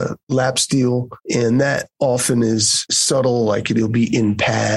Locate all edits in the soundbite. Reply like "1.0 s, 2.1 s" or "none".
1.2 s